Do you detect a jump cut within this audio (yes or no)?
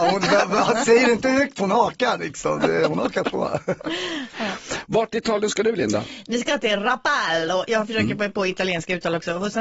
no